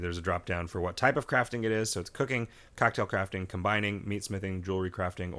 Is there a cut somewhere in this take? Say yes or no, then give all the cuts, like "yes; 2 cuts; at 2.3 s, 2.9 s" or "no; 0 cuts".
no; 0 cuts